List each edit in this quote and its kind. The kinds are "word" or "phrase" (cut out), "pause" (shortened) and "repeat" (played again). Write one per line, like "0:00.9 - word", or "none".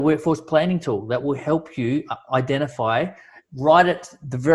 none